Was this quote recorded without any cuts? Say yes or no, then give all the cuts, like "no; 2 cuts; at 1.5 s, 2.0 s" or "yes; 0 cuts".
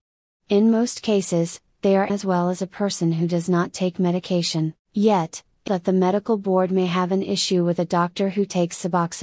no; 3 cuts; at 2.1 s, 4.8 s, 5.7 s